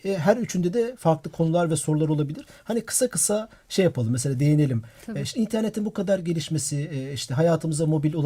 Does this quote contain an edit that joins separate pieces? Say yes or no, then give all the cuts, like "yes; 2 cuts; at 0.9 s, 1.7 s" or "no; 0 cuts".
no; 0 cuts